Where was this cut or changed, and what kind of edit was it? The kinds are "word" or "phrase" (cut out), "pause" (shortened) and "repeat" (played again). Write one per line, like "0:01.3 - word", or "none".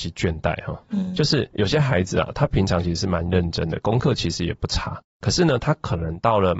0:01.5 - pause